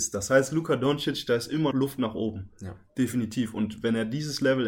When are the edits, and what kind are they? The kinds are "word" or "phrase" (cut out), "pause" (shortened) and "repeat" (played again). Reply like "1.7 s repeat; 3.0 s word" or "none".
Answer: 1.7 s word